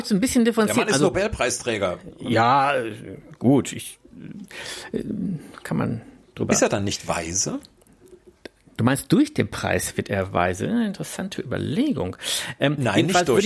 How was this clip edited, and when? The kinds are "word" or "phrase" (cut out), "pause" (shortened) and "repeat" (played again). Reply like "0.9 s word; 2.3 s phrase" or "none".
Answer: none